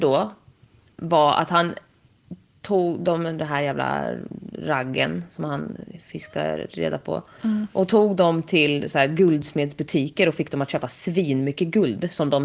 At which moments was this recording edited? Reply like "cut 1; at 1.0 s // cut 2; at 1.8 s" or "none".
none